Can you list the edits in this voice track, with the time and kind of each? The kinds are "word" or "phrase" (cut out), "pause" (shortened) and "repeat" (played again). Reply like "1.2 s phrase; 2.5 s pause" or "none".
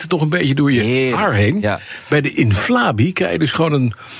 none